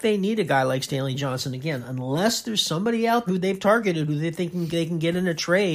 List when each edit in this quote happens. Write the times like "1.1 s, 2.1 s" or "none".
3.3 s